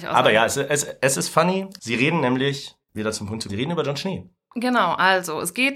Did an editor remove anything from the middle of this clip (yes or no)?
yes